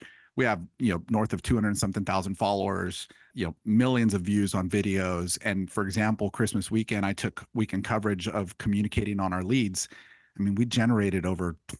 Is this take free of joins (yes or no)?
no